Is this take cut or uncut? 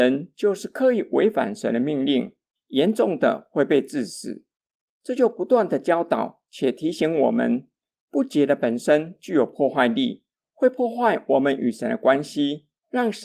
uncut